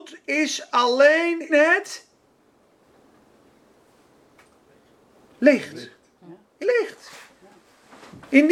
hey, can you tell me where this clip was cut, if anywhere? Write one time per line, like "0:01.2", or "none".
0:01.5
0:06.6